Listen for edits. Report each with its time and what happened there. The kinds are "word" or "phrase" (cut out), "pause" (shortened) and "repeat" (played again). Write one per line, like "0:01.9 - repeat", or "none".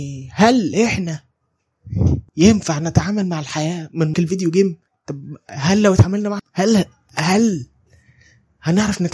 0:02.3 - pause
0:04.1 - word
0:04.9 - pause
0:06.4 - phrase